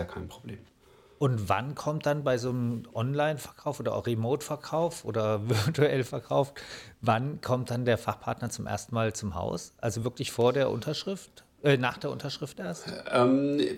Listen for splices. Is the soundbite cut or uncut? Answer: uncut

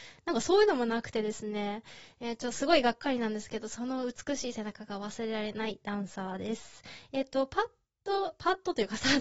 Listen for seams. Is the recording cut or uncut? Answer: uncut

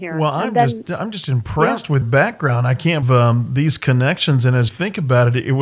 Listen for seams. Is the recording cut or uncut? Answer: cut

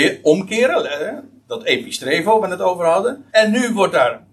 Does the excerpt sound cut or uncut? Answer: cut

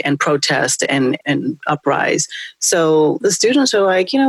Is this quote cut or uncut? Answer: cut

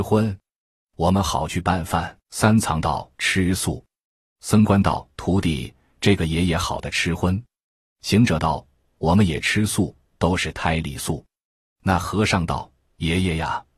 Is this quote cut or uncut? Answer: cut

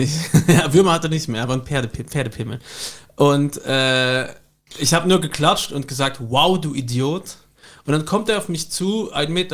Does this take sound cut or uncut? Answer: uncut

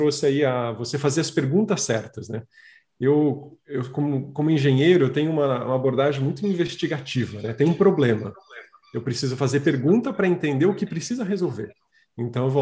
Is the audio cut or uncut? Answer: uncut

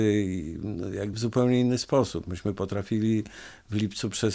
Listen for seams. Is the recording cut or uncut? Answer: cut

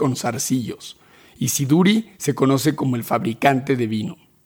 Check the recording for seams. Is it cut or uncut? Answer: uncut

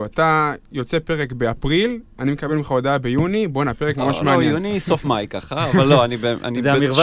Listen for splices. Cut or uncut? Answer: uncut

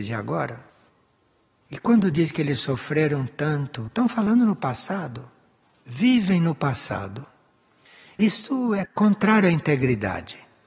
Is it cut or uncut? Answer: uncut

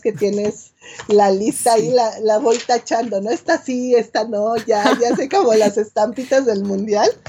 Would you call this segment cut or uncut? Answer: uncut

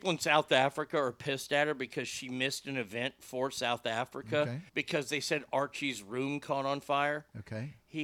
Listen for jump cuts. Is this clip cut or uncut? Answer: cut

